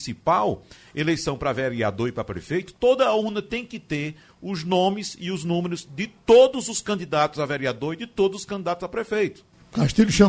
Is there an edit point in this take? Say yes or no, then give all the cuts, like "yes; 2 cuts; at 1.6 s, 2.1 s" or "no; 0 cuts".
no; 0 cuts